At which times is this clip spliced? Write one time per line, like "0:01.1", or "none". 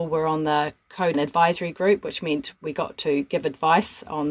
0:01.1